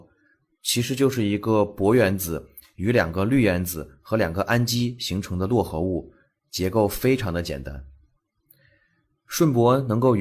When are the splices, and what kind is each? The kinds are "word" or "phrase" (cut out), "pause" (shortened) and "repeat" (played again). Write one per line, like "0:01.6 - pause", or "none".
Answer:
none